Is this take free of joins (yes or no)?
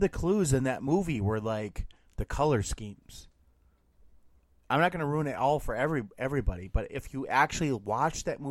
yes